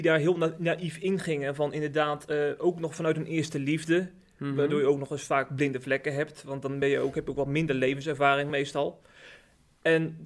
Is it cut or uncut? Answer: uncut